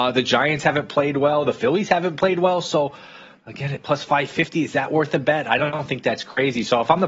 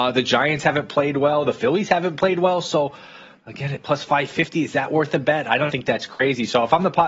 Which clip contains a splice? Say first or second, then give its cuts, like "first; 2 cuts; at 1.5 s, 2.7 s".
second; 1 cut; at 5.7 s